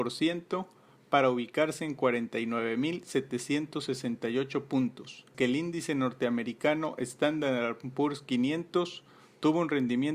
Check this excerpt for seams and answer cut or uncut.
cut